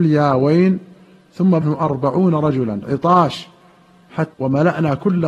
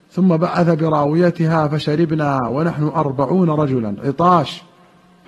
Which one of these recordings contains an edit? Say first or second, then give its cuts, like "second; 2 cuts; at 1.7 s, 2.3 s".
first; 2 cuts; at 1.6 s, 4.3 s